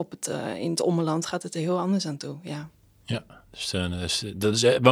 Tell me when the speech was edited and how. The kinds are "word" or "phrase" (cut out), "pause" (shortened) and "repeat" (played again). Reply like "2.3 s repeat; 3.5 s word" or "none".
none